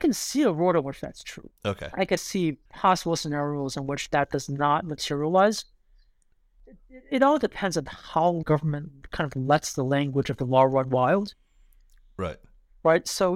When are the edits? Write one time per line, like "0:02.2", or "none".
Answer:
0:01.6
0:02.2
0:02.7
0:08.4